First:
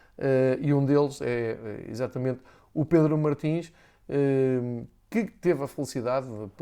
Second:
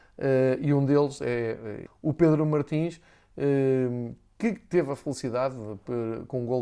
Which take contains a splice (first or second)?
second